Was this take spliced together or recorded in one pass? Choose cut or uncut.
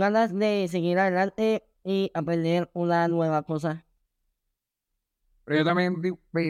uncut